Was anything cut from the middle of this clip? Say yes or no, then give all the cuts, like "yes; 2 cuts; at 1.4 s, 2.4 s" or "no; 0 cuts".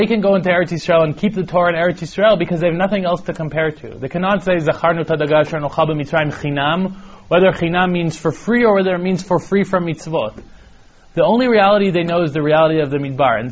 no; 0 cuts